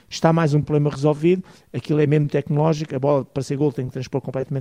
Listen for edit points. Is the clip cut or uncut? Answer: uncut